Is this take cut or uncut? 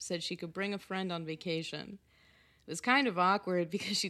uncut